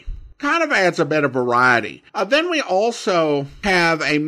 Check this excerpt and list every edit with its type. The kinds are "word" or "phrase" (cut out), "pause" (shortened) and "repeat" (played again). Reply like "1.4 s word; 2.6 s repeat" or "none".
2.1 s pause